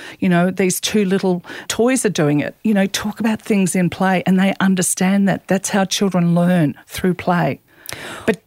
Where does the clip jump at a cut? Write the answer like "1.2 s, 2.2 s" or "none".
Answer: 1.7 s